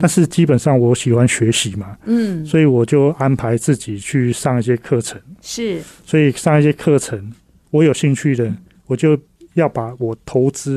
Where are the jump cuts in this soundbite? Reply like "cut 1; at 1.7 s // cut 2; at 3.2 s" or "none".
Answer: none